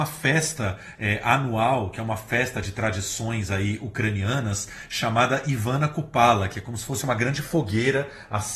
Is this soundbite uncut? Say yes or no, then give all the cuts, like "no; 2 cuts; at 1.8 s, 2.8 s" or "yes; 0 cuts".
yes; 0 cuts